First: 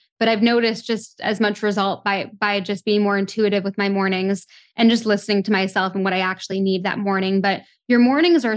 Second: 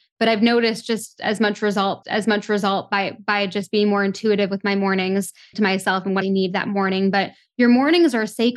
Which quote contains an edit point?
second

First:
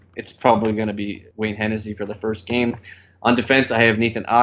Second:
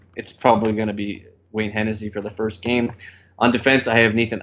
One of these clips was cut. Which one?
first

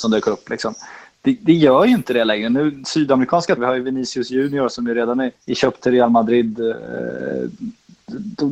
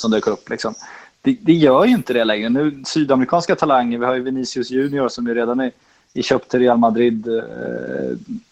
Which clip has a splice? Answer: first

